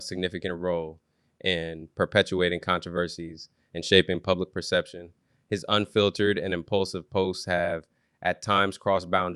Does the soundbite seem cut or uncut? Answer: uncut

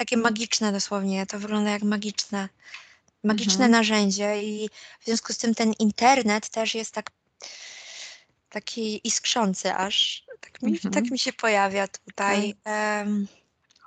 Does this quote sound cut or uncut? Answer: uncut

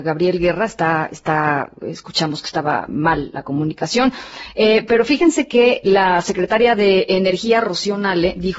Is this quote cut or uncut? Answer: cut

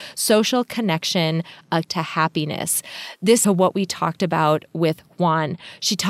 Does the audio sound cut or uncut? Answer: cut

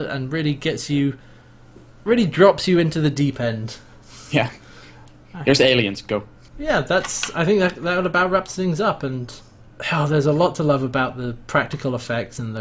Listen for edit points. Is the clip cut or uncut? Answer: uncut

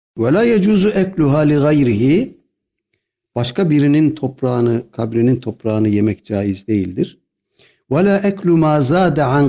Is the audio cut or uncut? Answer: uncut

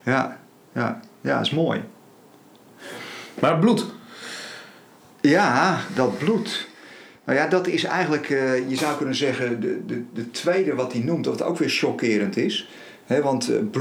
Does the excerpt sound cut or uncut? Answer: uncut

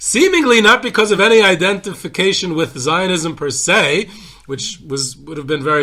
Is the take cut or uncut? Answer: uncut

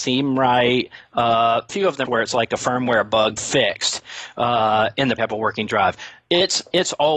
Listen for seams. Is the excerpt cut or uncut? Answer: cut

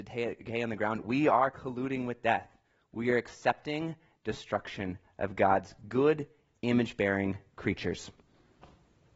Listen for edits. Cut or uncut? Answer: uncut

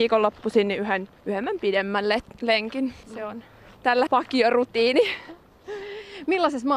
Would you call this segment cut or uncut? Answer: cut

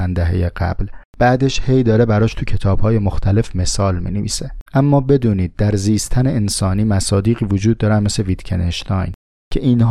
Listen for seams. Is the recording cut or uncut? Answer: cut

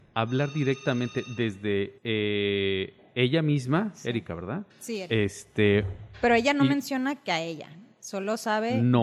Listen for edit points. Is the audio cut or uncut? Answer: cut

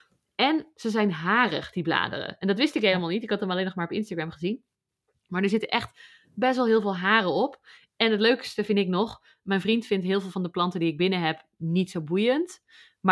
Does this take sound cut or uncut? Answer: uncut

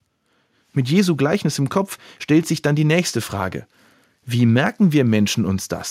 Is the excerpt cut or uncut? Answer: uncut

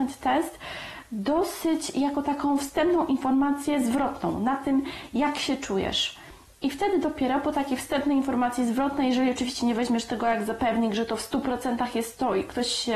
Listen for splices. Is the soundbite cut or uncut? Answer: uncut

